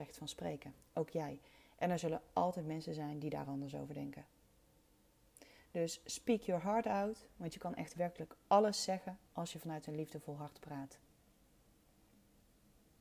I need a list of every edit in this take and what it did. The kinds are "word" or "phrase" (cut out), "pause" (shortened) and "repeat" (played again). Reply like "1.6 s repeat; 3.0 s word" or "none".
none